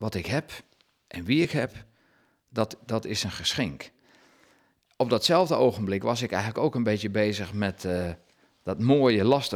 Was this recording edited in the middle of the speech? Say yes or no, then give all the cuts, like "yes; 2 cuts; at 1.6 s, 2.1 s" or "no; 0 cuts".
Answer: no; 0 cuts